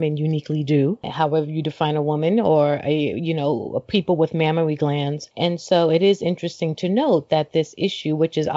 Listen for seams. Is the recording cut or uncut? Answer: uncut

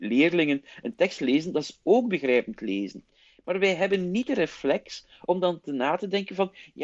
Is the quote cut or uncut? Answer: uncut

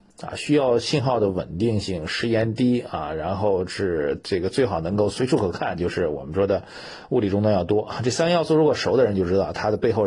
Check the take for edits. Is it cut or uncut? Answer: uncut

